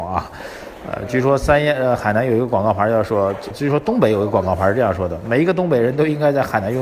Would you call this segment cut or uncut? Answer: cut